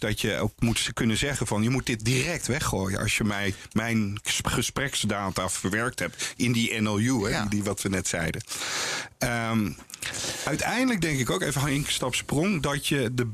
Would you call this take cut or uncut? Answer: uncut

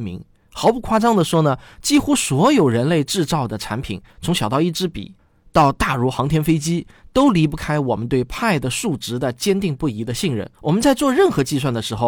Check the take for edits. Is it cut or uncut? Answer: cut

